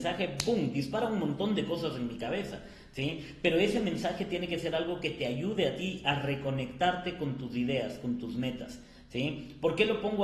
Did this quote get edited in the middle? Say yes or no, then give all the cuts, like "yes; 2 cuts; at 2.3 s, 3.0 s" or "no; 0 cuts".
no; 0 cuts